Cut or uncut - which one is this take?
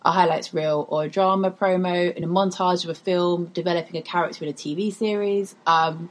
uncut